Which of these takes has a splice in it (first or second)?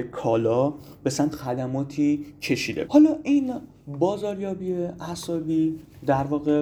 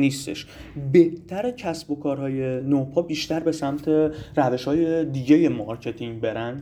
first